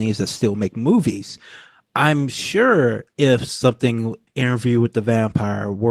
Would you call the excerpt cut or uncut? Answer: cut